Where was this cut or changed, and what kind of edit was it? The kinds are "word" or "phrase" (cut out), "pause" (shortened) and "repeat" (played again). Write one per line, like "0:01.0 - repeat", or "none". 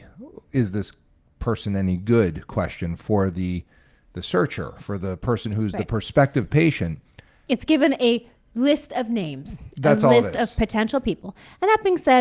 none